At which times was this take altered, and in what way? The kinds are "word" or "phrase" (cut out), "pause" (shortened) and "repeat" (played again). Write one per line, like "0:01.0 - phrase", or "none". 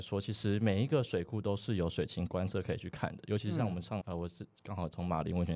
0:04.0 - word